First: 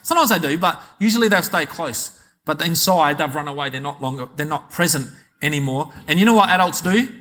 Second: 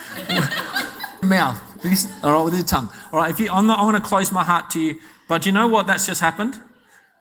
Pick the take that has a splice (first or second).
second